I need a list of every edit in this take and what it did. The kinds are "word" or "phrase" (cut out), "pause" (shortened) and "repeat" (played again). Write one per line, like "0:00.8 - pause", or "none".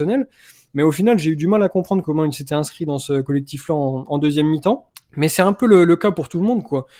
0:04.9 - pause